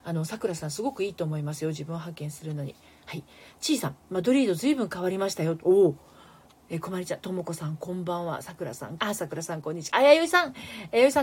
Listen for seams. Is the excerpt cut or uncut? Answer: cut